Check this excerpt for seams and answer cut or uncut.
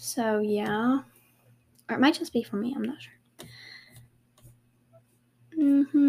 uncut